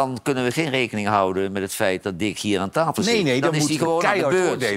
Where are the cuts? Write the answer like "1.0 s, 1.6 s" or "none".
none